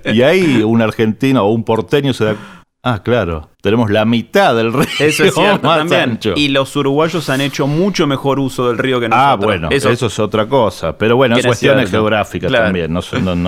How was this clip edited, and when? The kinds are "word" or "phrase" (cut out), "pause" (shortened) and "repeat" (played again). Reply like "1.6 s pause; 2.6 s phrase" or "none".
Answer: 2.6 s pause; 3.5 s pause; 11.4 s phrase